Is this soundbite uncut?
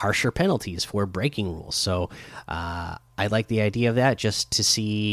yes; 0 cuts

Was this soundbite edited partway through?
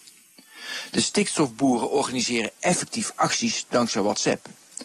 no; 0 cuts

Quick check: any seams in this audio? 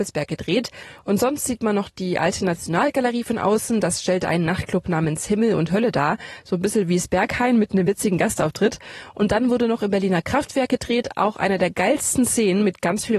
no; 0 cuts

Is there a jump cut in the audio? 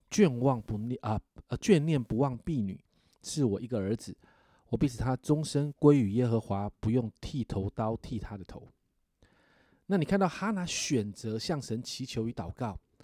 no; 0 cuts

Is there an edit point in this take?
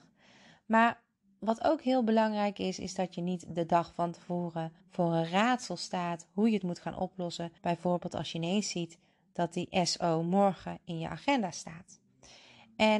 yes; 2 cuts; at 4.8 s, 7.6 s

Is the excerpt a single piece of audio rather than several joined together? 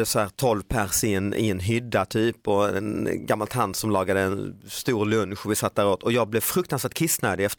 yes; 0 cuts

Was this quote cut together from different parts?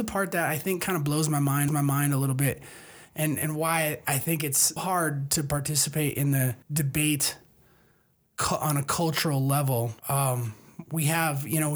yes; 4 cuts; at 1.7 s, 4.8 s, 6.6 s, 10.0 s

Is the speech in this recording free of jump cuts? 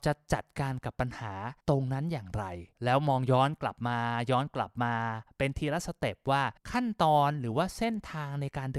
no; 3 cuts; at 1.6 s, 2.7 s, 6.6 s

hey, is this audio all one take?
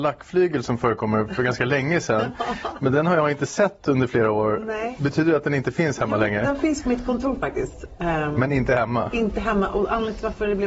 yes; 0 cuts

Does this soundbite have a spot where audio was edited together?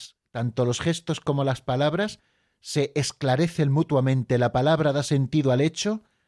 no; 0 cuts

